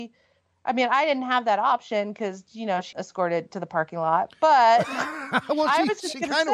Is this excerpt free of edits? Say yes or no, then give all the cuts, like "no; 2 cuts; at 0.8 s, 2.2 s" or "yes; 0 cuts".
no; 1 cut; at 2.9 s